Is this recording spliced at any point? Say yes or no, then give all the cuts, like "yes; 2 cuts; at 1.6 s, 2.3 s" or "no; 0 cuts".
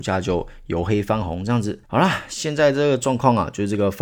yes; 1 cut; at 1.8 s